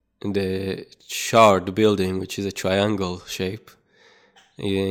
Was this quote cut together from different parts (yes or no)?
no